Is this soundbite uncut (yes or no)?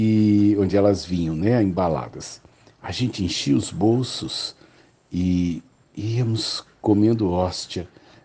yes